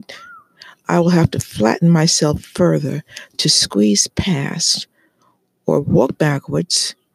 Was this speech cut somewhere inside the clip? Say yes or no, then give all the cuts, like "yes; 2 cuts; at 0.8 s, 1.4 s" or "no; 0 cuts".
no; 0 cuts